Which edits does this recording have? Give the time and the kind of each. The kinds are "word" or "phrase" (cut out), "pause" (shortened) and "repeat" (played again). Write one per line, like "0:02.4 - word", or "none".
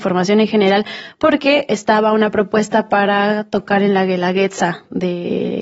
none